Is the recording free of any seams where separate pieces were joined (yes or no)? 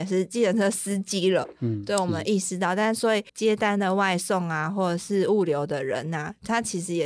no